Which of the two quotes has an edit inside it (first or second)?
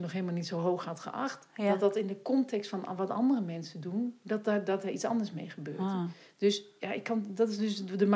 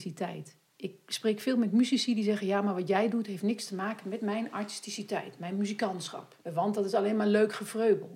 second